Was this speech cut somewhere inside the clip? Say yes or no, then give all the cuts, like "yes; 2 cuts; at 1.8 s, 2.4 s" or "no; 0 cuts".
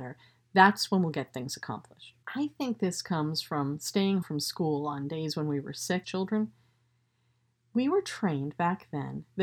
yes; 3 cuts; at 2.2 s, 4.2 s, 6.0 s